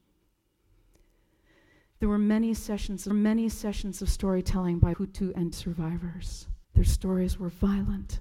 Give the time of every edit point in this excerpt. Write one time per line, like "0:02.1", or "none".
0:03.1
0:04.9
0:05.5
0:06.6

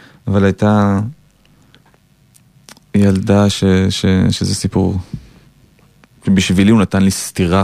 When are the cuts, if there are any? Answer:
none

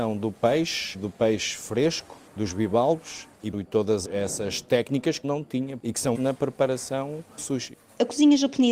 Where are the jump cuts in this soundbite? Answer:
0:00.9
0:02.3
0:03.5
0:04.0
0:05.2
0:06.1
0:07.4

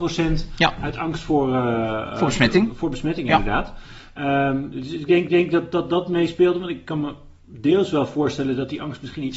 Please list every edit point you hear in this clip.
0:05.3

